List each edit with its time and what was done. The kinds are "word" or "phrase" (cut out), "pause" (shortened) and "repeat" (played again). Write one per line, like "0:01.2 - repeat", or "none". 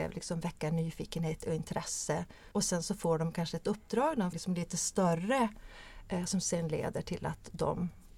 0:02.5 - pause
0:04.3 - word